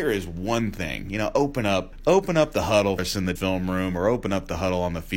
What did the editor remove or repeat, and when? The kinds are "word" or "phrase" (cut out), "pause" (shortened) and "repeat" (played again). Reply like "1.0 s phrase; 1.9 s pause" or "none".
3.0 s word; 3.4 s word